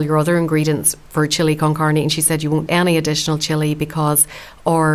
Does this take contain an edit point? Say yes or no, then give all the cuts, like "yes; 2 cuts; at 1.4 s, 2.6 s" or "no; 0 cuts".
yes; 1 cut; at 2.7 s